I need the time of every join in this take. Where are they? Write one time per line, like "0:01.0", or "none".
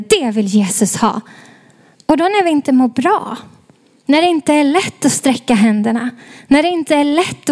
none